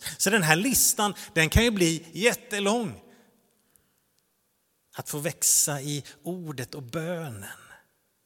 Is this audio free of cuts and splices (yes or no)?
yes